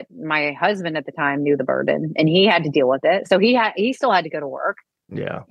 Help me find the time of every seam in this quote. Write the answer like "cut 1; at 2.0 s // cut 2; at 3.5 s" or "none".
none